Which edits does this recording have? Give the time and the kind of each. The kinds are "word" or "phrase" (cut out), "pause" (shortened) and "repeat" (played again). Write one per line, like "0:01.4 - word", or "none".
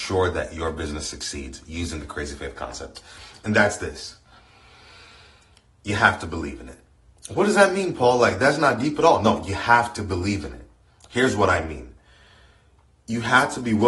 none